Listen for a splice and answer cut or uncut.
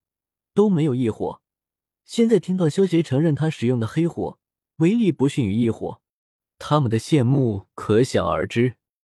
uncut